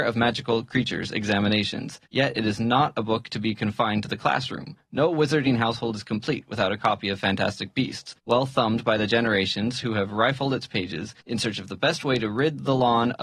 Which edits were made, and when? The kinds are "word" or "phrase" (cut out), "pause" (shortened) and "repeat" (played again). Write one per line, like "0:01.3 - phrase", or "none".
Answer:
0:02.1 - pause
0:08.2 - pause
0:11.2 - pause

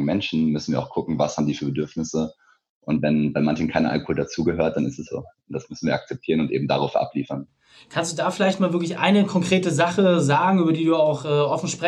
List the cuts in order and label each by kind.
0:05.1 - word

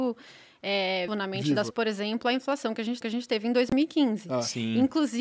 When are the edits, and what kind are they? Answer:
0:01.1 - word
0:01.7 - word
0:03.0 - repeat

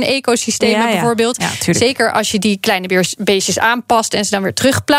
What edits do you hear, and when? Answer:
none

